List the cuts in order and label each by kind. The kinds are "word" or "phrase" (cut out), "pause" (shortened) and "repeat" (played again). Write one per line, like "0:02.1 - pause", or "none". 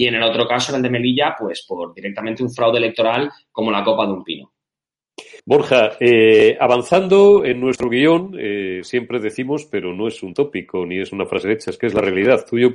0:05.4 - pause